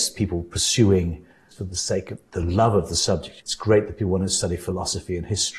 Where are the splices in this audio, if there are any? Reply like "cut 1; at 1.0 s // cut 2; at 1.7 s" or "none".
cut 1; at 1.5 s // cut 2; at 3.4 s